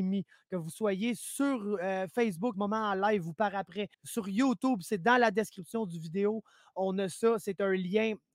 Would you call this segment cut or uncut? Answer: cut